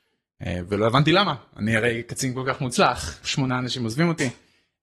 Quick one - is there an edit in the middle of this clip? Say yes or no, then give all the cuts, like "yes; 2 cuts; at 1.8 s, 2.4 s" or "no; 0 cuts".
yes; 1 cut; at 3.2 s